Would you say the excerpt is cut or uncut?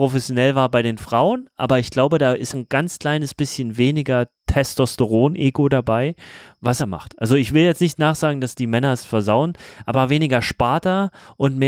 cut